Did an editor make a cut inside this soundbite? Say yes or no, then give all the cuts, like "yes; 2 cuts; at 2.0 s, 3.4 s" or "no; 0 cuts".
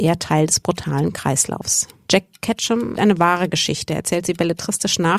yes; 1 cut; at 3.0 s